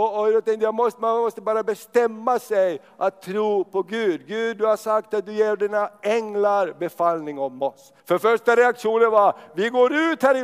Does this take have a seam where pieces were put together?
yes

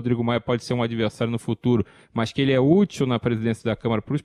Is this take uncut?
yes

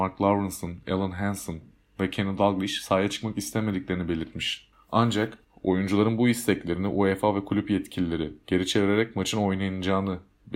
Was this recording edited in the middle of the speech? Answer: no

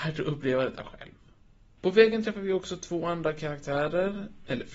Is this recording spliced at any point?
no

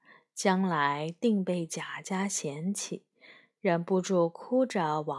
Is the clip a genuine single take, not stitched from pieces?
yes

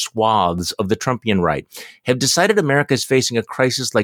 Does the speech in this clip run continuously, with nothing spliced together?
yes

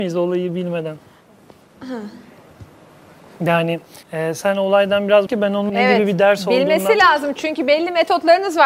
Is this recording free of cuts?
no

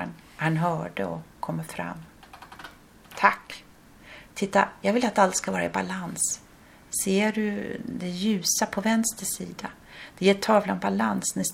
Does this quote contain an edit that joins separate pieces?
no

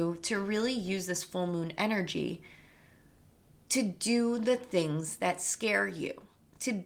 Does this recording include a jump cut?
no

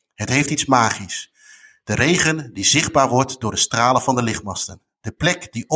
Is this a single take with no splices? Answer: yes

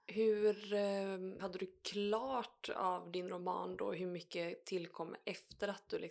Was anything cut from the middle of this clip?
yes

